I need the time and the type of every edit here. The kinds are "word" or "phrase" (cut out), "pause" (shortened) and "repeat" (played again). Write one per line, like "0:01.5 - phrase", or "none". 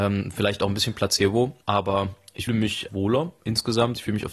0:01.6 - pause
0:02.5 - word
0:02.9 - word